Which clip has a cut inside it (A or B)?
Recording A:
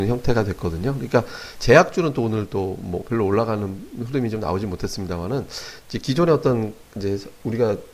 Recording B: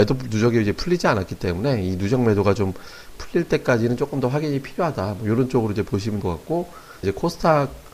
B